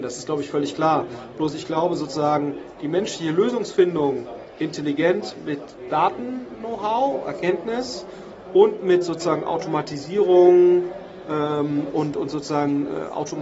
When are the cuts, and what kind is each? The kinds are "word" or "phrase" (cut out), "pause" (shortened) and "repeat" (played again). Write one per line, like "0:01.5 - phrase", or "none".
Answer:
none